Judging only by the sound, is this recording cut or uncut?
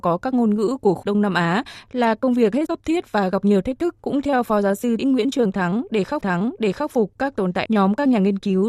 cut